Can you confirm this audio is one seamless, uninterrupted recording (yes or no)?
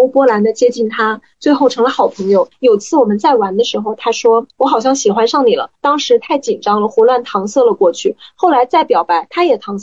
no